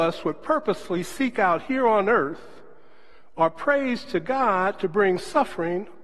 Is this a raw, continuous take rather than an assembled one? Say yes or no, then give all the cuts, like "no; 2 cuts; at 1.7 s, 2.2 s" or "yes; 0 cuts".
yes; 0 cuts